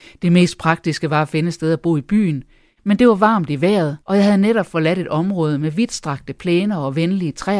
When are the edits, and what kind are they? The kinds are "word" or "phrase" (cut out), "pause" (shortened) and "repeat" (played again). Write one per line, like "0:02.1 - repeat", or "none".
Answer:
0:04.0 - pause